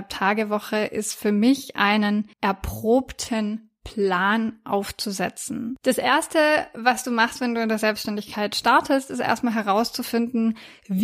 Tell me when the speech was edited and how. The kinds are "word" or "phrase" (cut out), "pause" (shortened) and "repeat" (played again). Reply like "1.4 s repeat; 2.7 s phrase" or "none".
2.3 s pause